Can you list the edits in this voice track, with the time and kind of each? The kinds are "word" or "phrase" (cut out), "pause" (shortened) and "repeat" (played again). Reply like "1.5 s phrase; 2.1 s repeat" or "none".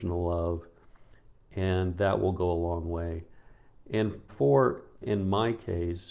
4.3 s word; 5.0 s word